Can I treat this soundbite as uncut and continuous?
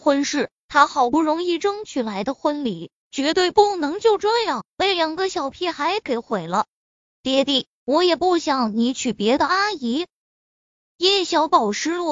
yes; 0 cuts

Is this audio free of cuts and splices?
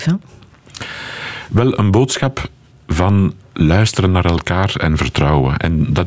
yes; 0 cuts

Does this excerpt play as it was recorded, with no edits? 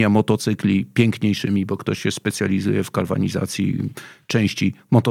yes; 0 cuts

